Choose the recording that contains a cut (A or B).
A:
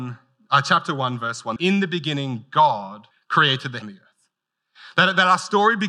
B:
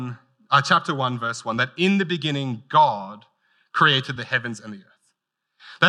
A